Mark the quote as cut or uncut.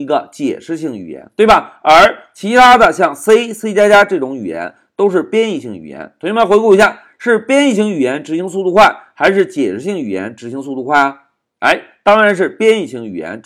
uncut